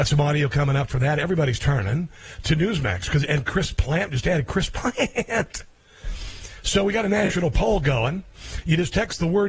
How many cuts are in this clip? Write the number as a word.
zero